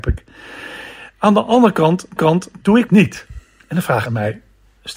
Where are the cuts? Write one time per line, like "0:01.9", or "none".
0:02.2
0:02.9
0:04.1